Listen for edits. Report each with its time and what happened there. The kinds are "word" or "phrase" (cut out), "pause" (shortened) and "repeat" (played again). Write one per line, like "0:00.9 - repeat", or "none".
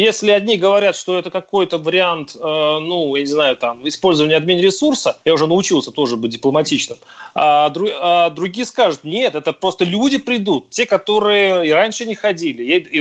0:05.2 - pause